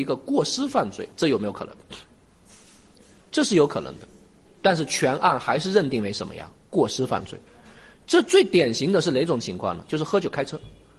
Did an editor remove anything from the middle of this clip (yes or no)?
no